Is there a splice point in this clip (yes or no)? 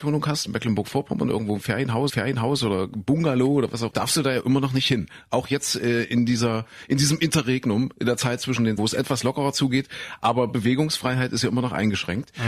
yes